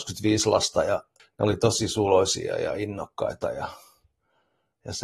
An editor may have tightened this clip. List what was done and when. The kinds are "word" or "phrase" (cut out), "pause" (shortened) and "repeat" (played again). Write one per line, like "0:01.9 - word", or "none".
none